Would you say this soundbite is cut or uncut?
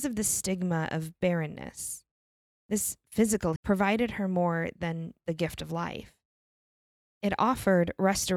cut